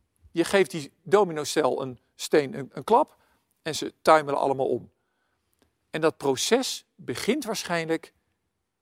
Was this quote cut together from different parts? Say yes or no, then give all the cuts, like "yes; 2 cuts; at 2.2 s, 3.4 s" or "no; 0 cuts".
no; 0 cuts